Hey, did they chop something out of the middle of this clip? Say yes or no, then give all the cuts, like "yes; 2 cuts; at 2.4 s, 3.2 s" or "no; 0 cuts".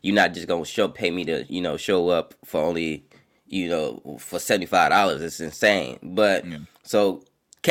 no; 0 cuts